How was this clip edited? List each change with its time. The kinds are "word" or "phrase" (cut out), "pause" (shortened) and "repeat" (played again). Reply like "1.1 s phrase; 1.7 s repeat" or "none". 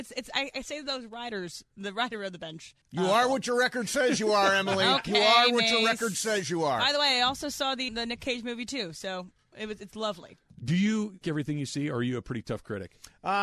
2.8 s pause; 7.9 s word; 11.2 s word

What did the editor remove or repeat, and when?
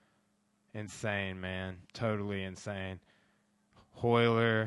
1.9 s pause

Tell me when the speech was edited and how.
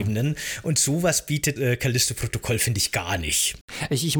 1.6 s word

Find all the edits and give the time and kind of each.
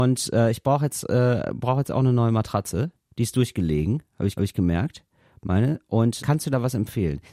4.4 s repeat; 6.2 s word

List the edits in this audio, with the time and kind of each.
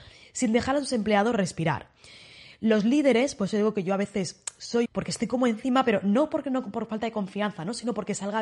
4.8 s phrase

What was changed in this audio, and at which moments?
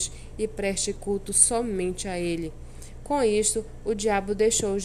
none

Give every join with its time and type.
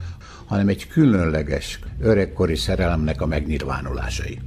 none

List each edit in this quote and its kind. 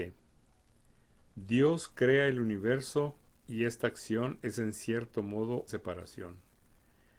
5.7 s word

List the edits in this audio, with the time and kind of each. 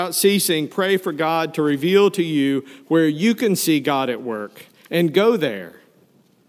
none

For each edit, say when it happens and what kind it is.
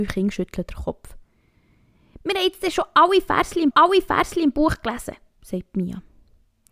3.7 s repeat

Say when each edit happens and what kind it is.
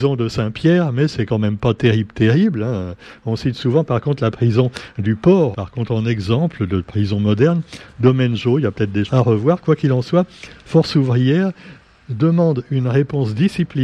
5.5 s word; 9.1 s word

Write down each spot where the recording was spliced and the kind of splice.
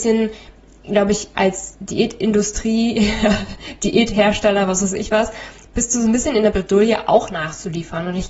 none

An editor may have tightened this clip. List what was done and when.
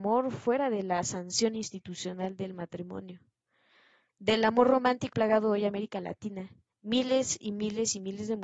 5.1 s word

